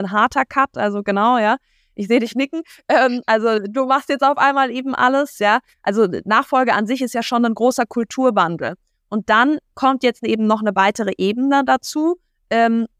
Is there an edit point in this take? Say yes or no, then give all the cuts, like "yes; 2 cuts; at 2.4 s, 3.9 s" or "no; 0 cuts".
no; 0 cuts